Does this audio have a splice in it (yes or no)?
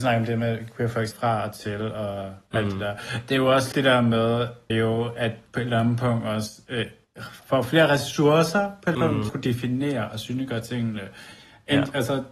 yes